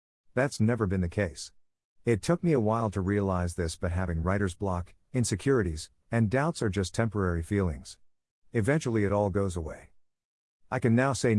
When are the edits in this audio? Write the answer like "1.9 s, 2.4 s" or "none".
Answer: none